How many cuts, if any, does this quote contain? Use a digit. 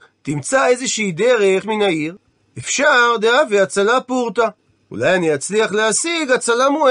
1